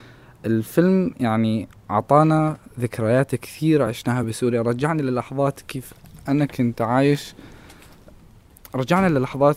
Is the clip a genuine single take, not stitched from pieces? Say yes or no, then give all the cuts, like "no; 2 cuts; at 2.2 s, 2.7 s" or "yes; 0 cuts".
yes; 0 cuts